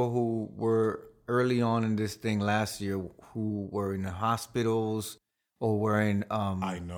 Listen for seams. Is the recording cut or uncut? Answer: uncut